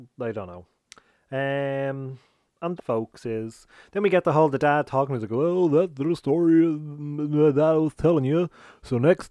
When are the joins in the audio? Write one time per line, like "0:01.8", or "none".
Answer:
0:02.8